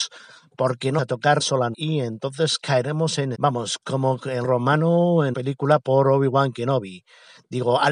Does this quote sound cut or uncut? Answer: cut